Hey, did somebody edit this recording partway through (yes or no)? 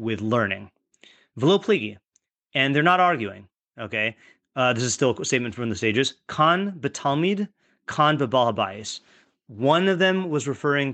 no